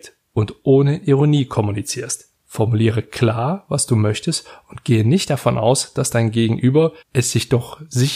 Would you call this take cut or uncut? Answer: cut